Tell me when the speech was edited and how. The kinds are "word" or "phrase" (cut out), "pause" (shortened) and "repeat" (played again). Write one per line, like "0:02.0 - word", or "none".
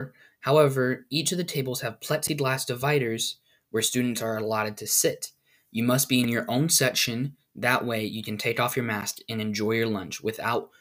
none